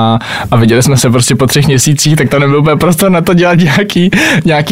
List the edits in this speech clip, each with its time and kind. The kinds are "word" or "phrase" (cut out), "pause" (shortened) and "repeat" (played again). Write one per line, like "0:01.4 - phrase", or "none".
none